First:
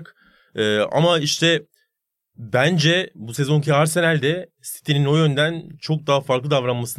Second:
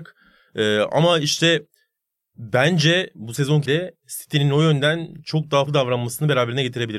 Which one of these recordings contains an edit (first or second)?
second